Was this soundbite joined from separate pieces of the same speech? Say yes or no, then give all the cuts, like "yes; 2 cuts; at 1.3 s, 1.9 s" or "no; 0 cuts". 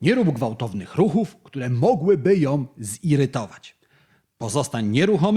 no; 0 cuts